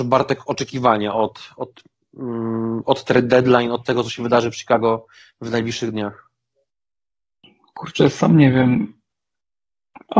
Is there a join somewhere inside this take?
no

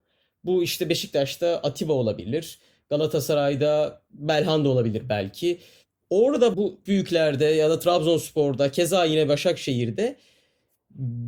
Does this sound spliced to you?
yes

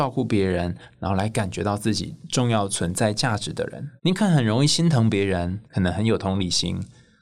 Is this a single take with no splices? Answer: no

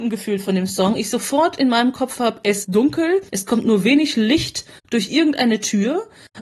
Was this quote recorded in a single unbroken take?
no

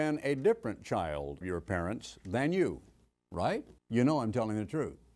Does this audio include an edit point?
yes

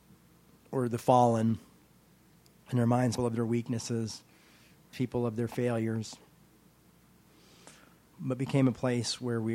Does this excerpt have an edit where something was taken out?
yes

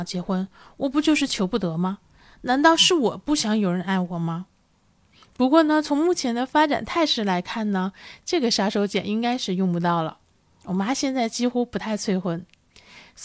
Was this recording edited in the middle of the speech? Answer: no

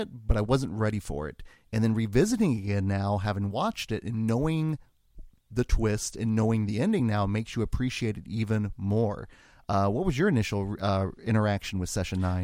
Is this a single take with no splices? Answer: yes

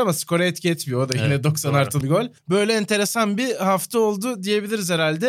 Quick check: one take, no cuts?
no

